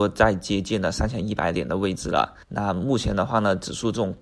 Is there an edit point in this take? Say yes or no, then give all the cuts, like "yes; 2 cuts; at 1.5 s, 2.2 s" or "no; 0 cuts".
yes; 1 cut; at 2.4 s